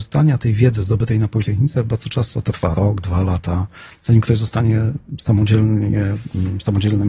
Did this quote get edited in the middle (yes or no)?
no